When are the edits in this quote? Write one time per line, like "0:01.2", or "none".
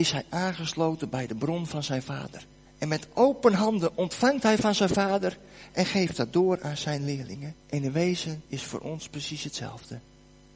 0:02.7
0:07.6
0:08.5